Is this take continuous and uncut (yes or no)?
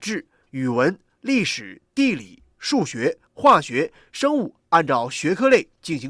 no